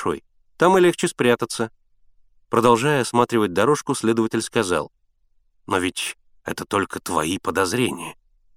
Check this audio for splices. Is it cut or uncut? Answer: uncut